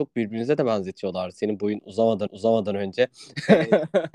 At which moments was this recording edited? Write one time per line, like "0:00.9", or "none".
0:02.3